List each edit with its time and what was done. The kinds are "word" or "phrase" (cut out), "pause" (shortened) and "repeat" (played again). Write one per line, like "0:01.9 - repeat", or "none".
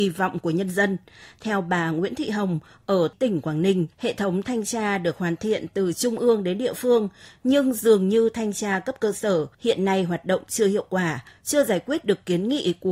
0:03.9 - pause
0:09.5 - pause